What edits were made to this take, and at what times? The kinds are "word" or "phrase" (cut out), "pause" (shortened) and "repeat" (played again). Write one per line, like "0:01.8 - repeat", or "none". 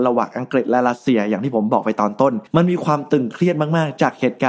0:02.5 - pause